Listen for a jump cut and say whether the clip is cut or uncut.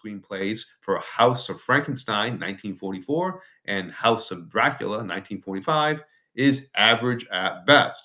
uncut